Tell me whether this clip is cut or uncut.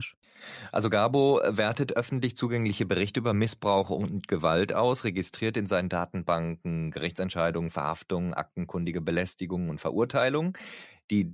uncut